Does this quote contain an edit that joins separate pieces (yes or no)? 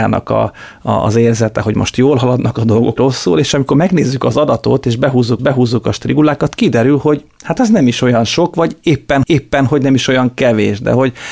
yes